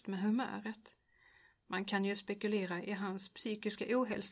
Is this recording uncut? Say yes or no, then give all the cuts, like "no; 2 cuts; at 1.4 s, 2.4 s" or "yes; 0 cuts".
yes; 0 cuts